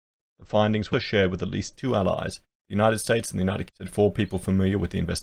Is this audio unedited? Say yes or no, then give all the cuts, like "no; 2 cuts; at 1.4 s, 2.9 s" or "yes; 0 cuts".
no; 2 cuts; at 0.9 s, 3.7 s